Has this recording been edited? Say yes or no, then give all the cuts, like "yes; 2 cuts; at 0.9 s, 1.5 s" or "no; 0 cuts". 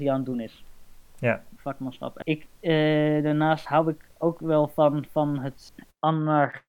yes; 2 cuts; at 1.1 s, 2.2 s